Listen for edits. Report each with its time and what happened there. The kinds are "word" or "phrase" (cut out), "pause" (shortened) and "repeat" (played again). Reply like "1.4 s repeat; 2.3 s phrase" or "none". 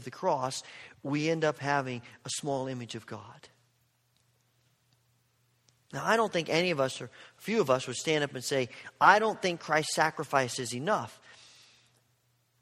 none